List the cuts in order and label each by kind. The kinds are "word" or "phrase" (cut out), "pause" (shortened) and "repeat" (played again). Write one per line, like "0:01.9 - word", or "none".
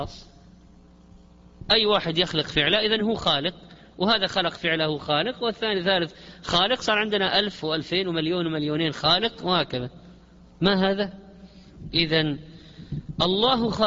none